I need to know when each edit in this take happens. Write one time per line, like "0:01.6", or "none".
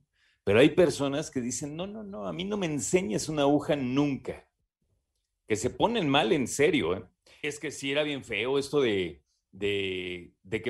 none